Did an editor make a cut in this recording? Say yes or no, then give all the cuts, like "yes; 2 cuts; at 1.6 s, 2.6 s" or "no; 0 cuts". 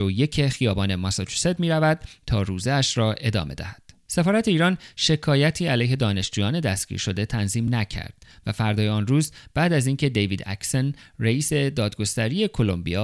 no; 0 cuts